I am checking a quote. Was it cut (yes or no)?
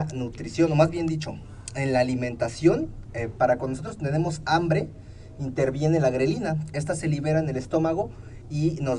no